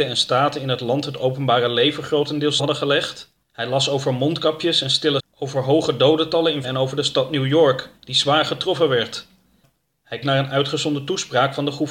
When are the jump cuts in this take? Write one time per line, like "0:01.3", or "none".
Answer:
0:02.6
0:03.4
0:05.2
0:06.6
0:08.0
0:10.2